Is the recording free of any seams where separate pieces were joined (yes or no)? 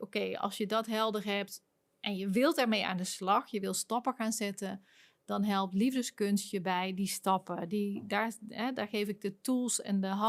yes